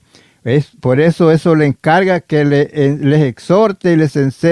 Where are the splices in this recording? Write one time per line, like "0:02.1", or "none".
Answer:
none